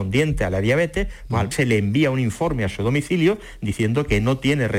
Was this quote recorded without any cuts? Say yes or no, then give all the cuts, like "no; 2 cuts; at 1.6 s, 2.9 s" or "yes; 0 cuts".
no; 1 cut; at 1.5 s